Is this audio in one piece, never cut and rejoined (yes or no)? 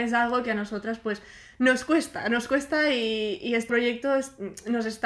no